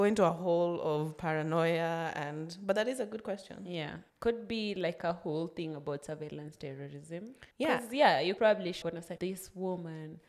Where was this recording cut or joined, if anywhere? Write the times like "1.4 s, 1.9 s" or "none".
4.1 s, 7.5 s, 8.4 s, 8.8 s, 9.2 s